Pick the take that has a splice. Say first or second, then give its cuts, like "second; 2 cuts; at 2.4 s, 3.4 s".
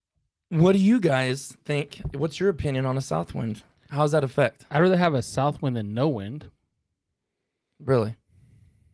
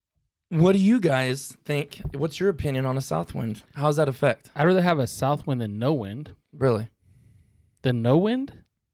second; 2 cuts; at 3.7 s, 6.4 s